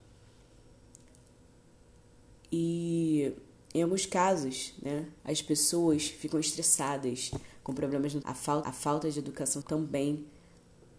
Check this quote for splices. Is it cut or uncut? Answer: cut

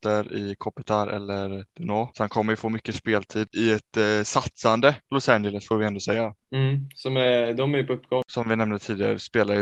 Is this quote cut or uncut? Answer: cut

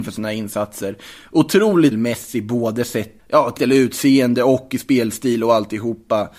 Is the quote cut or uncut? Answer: cut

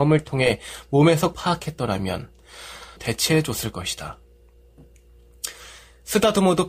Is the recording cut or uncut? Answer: cut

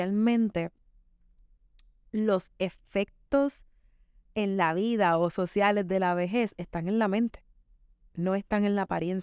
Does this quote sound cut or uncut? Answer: uncut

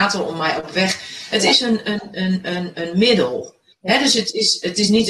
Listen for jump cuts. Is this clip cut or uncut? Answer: cut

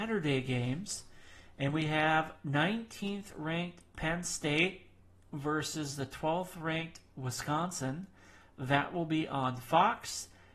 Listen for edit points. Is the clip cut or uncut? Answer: uncut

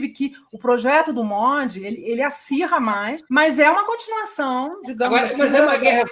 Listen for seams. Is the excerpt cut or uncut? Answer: cut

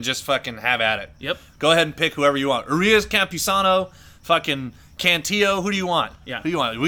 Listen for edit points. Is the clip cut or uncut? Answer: uncut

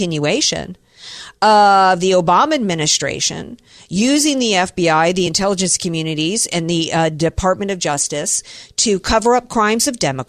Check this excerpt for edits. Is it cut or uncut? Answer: uncut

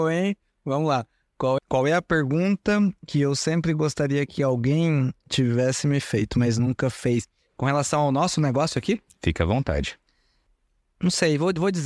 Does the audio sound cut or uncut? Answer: cut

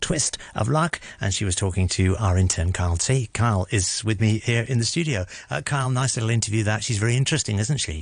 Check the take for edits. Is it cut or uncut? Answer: uncut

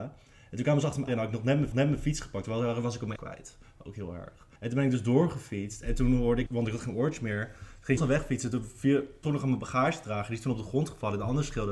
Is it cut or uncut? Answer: cut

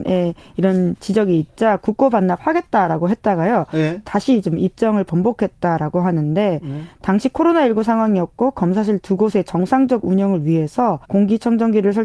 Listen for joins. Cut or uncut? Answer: cut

